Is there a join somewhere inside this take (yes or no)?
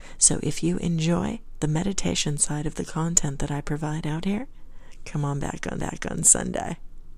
yes